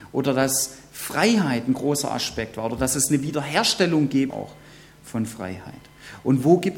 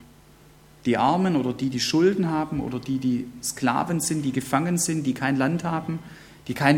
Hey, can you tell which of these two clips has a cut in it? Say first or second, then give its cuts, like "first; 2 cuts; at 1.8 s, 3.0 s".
first; 1 cut; at 4.3 s